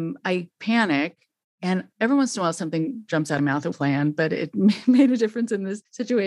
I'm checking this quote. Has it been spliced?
yes; 3 cuts; at 1.9 s, 3.4 s, 3.7 s

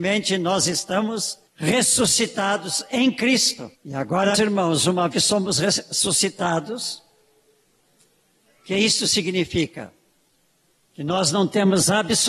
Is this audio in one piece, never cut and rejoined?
no; 4 cuts; at 1.5 s, 3.7 s, 4.3 s, 5.1 s

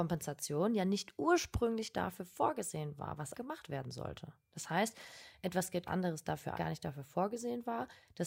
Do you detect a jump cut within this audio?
yes; 3 cuts; at 3.3 s, 5.9 s, 6.5 s

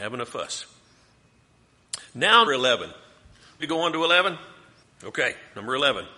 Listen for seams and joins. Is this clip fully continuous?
no; 3 cuts; at 2.5 s, 3.6 s, 4.8 s

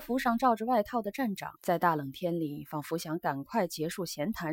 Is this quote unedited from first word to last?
no; 1 cut; at 1.6 s

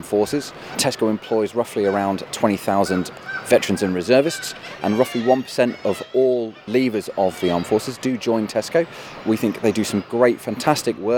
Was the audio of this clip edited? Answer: no; 0 cuts

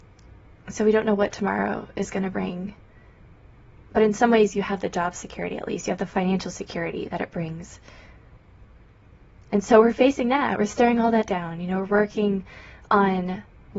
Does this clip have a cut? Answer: no; 0 cuts

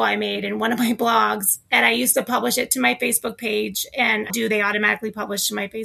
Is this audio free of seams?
no; 1 cut; at 4.3 s

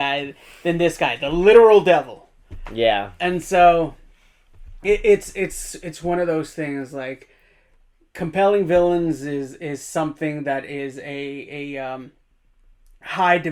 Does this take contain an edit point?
no; 0 cuts

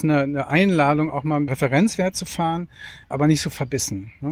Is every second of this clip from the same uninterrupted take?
no; 2 cuts; at 1.5 s, 3.1 s

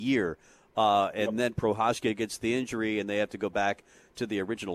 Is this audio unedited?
yes; 0 cuts

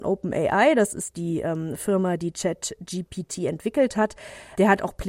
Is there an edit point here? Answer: no; 0 cuts

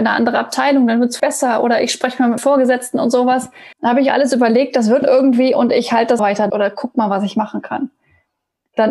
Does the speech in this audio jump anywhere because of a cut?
yes; 6 cuts; at 1.2 s, 2.4 s, 3.7 s, 5.0 s, 6.2 s, 6.5 s

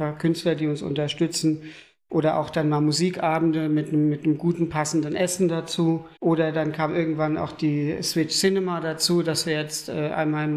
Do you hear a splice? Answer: yes; 1 cut; at 6.2 s

